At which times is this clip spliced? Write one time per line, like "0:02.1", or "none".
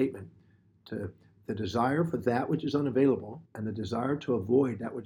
0:03.5